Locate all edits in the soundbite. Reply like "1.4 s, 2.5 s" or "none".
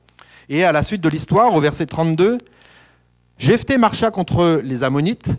none